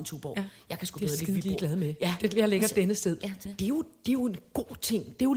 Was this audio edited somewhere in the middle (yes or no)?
yes